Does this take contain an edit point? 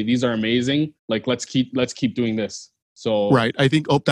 yes; 2 cuts; at 1.0 s, 2.8 s

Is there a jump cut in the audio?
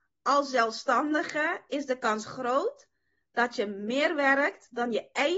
no; 0 cuts

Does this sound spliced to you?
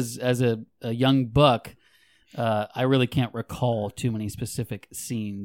no; 0 cuts

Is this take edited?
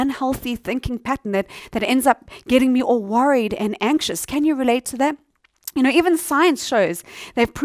no; 0 cuts

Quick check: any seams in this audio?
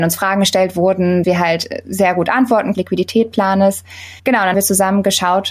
yes; 4 cuts; at 1.2 s, 2.7 s, 4.2 s, 4.5 s

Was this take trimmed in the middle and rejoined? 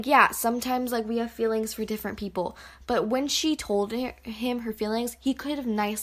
no; 0 cuts

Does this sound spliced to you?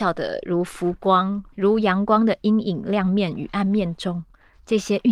yes; 1 cut; at 1.5 s

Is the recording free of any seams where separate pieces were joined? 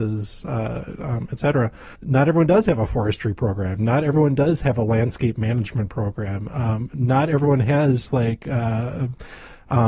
no; 1 cut; at 1.9 s

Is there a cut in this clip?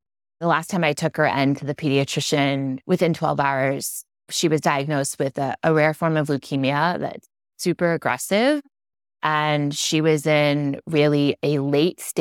no; 0 cuts

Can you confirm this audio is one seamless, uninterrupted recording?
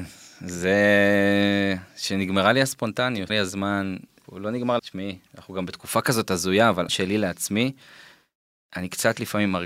no; 5 cuts; at 1.9 s, 3.3 s, 4.2 s, 4.8 s, 6.9 s

